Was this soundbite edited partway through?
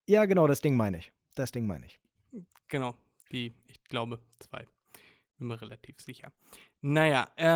no; 0 cuts

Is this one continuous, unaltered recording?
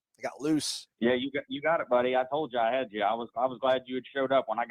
no; 1 cut; at 0.9 s

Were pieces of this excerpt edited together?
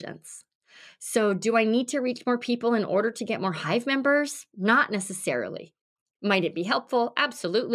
no; 0 cuts

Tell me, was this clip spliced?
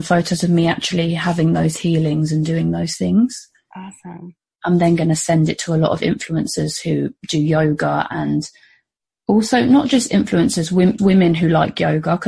yes; 1 cut; at 11.0 s

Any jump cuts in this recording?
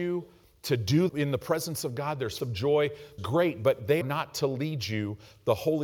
yes; 4 cuts; at 1.1 s, 2.4 s, 3.2 s, 4.0 s

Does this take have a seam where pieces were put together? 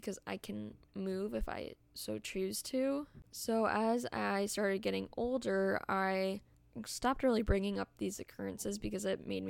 no; 0 cuts

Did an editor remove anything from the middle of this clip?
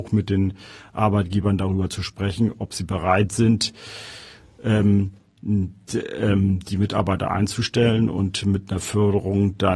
no; 0 cuts

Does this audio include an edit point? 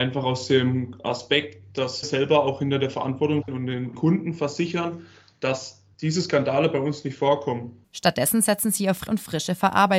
yes; 3 cuts; at 2.0 s, 3.4 s, 9.1 s

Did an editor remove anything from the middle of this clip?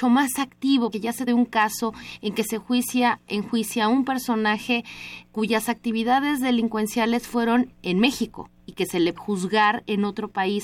yes; 5 cuts; at 0.9 s, 1.3 s, 5.2 s, 7.7 s, 9.2 s

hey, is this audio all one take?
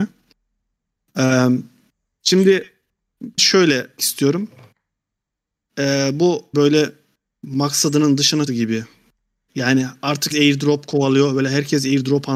no; 5 cuts; at 3.4 s, 4.0 s, 6.5 s, 8.5 s, 10.3 s

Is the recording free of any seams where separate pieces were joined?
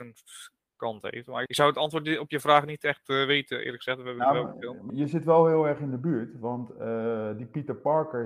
no; 2 cuts; at 1.5 s, 4.9 s

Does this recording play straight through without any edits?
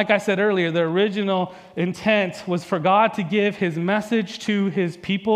yes; 0 cuts

